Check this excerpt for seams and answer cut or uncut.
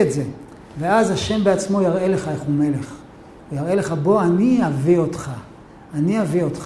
uncut